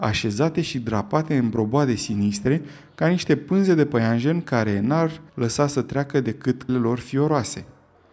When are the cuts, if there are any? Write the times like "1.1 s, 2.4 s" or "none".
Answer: 5.3 s, 6.7 s